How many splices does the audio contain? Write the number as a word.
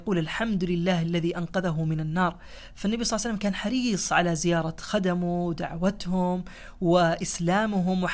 zero